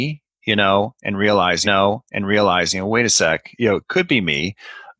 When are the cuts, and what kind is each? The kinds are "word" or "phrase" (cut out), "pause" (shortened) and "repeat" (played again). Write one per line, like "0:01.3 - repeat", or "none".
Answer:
0:01.6 - repeat